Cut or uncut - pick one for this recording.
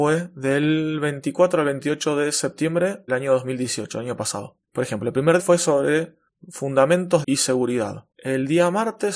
cut